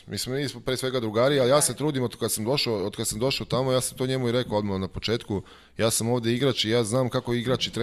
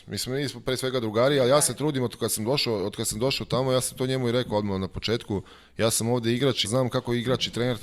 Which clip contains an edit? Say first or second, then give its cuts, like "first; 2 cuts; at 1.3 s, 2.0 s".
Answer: second; 1 cut; at 6.6 s